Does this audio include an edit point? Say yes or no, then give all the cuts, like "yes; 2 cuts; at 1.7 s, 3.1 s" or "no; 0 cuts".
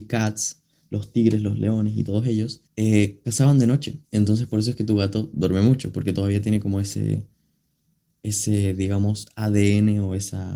yes; 2 cuts; at 2.7 s, 4.0 s